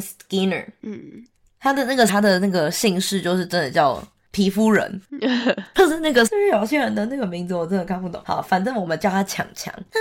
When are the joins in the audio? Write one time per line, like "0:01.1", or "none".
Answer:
0:02.1
0:06.3